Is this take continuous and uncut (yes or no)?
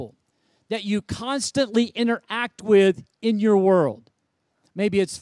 yes